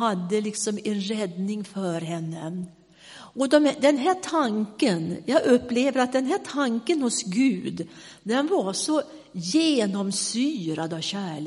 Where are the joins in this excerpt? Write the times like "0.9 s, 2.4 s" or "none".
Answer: none